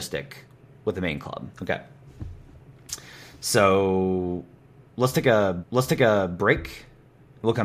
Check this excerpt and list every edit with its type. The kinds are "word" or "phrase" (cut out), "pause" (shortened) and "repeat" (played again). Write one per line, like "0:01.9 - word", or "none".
0:01.5 - pause
0:05.6 - repeat